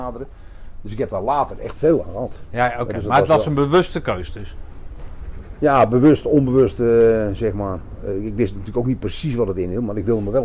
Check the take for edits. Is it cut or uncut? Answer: uncut